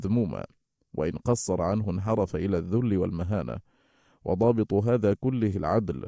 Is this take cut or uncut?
uncut